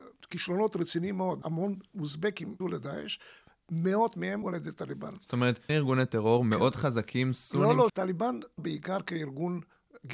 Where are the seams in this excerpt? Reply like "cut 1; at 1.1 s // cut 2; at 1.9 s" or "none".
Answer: cut 1; at 1.4 s // cut 2; at 2.6 s // cut 3; at 4.4 s // cut 4; at 5.7 s // cut 5; at 7.9 s // cut 6; at 8.6 s